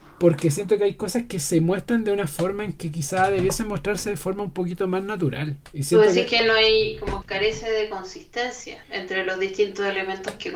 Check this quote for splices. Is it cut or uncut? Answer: cut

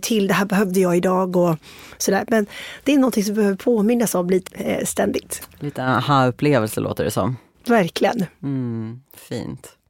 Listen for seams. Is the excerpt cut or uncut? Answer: cut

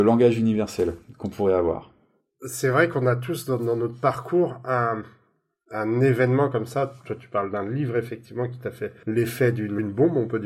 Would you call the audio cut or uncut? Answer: uncut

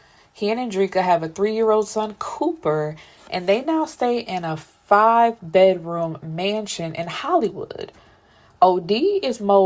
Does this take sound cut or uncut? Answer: uncut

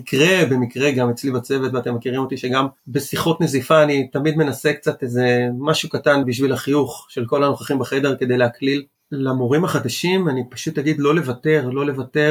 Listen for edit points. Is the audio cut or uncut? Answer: cut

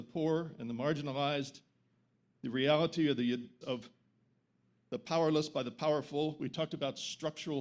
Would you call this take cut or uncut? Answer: cut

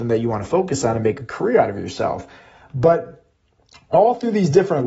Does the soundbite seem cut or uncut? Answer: uncut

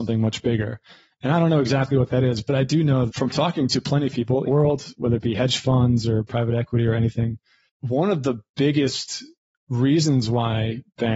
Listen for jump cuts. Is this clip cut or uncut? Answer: cut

